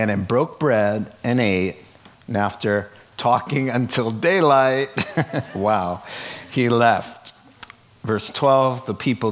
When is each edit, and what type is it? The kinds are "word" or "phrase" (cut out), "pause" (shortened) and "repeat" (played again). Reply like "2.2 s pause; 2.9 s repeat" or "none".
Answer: none